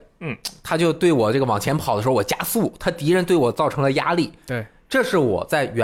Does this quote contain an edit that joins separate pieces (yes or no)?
no